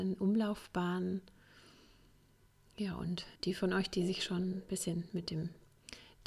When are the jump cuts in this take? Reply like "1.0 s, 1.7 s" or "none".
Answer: 3.4 s